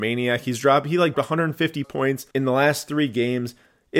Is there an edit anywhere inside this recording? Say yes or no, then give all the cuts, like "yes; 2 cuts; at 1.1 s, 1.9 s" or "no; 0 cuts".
yes; 3 cuts; at 1.1 s, 1.8 s, 2.3 s